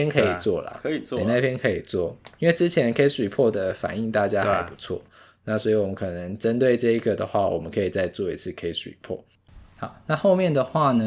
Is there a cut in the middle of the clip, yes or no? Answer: no